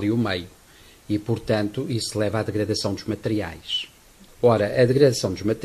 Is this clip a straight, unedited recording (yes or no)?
yes